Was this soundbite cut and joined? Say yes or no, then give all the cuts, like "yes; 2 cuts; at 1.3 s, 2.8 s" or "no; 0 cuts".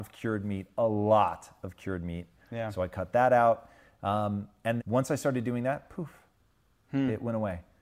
yes; 1 cut; at 4.8 s